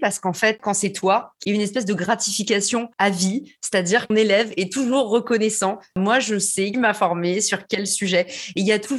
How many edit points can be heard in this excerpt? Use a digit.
4